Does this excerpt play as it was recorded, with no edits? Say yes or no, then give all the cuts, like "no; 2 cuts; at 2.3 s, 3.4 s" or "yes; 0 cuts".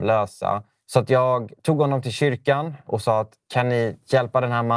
yes; 0 cuts